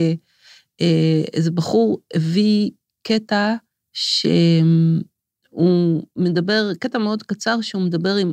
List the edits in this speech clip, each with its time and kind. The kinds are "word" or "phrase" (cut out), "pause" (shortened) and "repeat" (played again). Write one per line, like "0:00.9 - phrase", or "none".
0:03.7 - pause

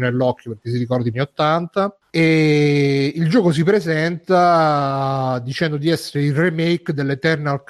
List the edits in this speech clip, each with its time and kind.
0:01.1 - phrase

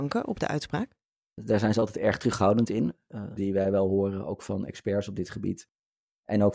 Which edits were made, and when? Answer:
0:03.4 - word

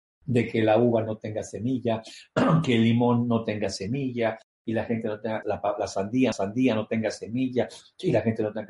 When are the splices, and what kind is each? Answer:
0:05.4 - word
0:06.3 - repeat

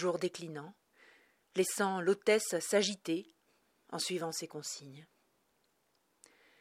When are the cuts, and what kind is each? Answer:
none

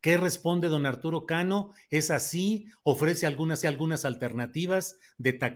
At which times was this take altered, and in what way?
0:03.6 - repeat

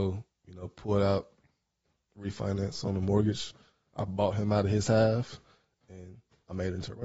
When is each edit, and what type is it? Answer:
none

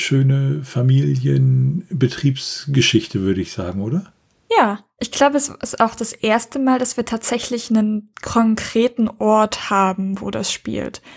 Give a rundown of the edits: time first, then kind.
none

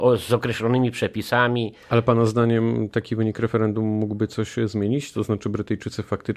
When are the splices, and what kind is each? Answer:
0:01.8 - pause

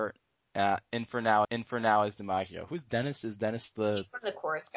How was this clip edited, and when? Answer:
0:01.4 - repeat

